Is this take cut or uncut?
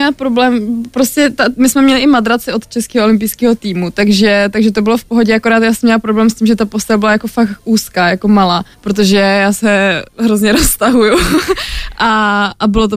cut